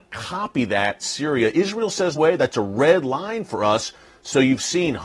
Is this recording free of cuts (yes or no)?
no